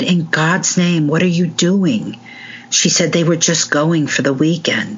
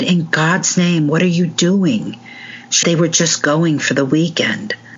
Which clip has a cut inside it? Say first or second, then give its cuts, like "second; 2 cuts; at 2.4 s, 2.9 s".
second; 1 cut; at 2.8 s